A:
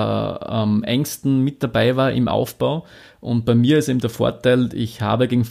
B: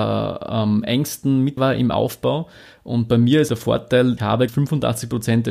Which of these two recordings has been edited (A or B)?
B